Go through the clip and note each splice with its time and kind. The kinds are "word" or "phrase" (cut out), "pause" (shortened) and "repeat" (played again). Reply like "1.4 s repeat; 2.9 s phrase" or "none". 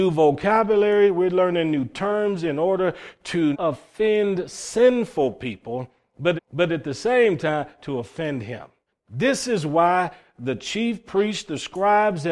3.5 s word; 6.4 s repeat; 8.9 s pause

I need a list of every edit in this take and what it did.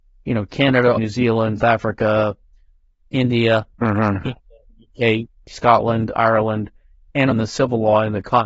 1.0 s word; 1.6 s word; 3.7 s pause; 7.3 s word

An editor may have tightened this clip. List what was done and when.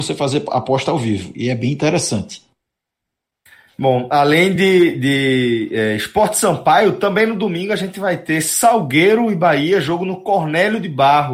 none

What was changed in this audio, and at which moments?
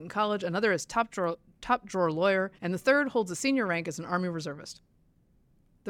2.6 s pause

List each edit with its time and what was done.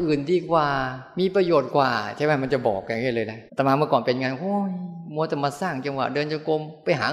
3.5 s pause

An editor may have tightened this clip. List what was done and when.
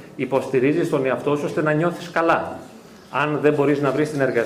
none

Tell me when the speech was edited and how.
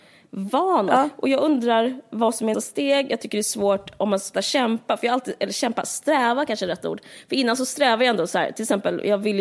2.5 s word; 4.3 s word

